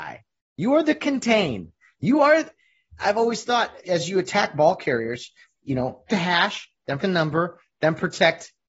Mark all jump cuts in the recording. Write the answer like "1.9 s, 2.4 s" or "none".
3.0 s, 3.8 s, 5.6 s, 6.1 s, 7.0 s